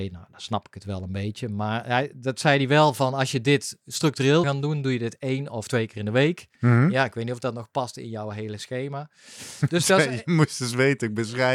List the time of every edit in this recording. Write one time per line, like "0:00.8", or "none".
0:04.4